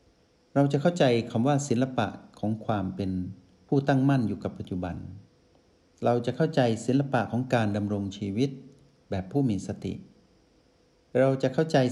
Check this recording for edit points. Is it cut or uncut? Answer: uncut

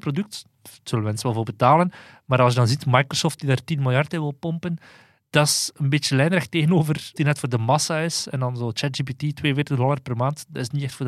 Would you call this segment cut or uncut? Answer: cut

